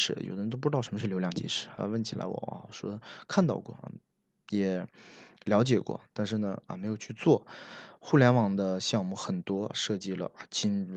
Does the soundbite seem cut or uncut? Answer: uncut